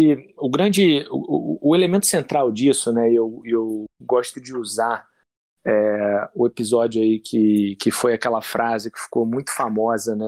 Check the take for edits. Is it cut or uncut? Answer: cut